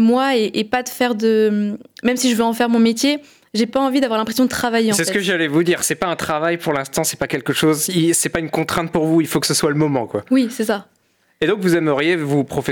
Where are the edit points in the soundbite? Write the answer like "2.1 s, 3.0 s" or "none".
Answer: none